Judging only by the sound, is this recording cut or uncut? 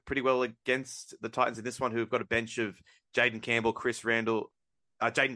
uncut